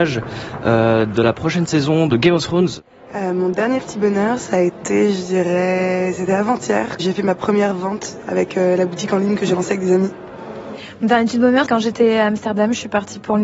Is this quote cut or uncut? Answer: cut